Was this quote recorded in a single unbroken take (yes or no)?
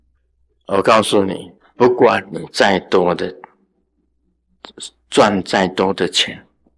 yes